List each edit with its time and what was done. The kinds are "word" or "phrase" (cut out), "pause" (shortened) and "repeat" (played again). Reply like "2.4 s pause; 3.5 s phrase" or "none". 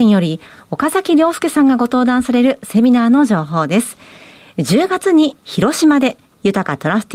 none

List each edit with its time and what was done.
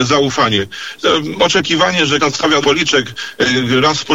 2.2 s word; 2.6 s word

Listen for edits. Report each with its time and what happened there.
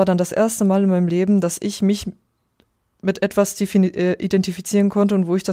none

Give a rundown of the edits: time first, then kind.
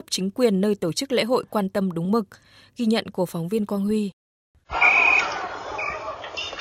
none

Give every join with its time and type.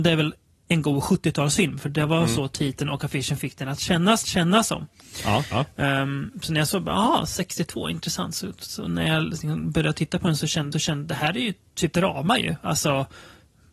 4.2 s repeat; 10.7 s repeat; 11.9 s word

